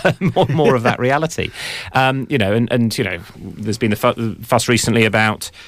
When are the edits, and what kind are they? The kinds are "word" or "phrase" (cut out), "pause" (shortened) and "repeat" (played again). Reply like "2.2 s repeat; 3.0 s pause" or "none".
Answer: none